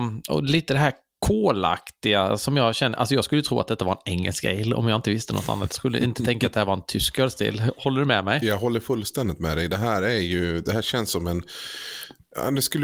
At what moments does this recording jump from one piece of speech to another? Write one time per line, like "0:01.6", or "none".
none